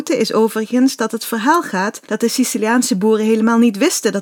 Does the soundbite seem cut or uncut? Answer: cut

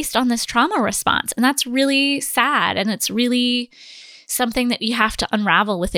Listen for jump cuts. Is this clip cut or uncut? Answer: uncut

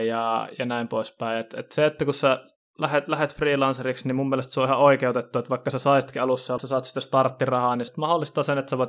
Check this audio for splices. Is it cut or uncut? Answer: cut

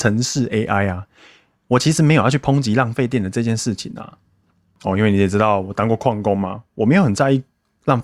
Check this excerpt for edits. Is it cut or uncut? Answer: uncut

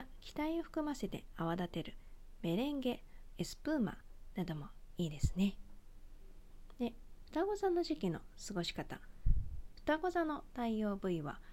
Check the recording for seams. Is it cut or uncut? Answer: cut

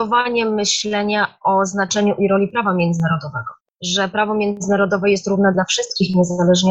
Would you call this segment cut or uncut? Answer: uncut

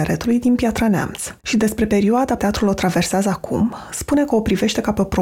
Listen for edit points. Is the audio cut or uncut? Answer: cut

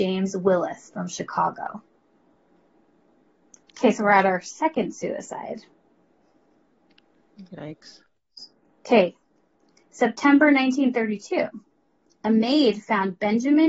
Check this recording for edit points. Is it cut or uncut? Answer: uncut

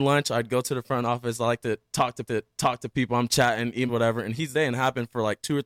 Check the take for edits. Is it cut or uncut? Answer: cut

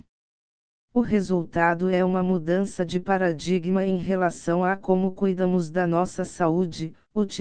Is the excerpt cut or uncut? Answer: uncut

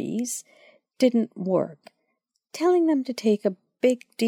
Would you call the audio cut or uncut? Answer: uncut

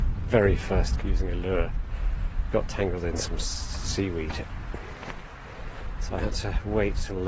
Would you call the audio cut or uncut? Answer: cut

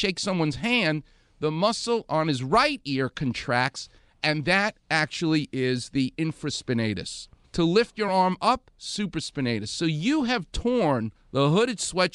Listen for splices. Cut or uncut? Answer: uncut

